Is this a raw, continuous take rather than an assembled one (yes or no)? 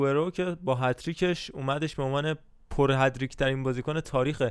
yes